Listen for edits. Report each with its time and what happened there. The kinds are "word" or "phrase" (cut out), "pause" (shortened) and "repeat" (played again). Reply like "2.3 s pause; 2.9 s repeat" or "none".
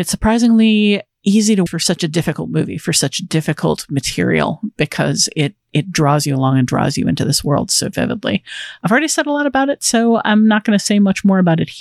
1.7 s word